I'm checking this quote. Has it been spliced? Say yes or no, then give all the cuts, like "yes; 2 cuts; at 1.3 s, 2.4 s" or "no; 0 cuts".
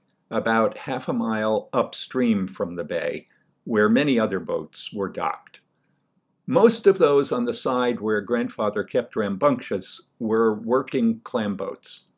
no; 0 cuts